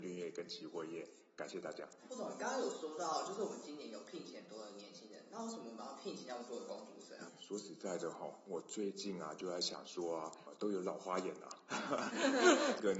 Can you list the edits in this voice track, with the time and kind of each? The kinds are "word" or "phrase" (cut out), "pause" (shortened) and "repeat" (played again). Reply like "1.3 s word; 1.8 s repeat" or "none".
2.0 s pause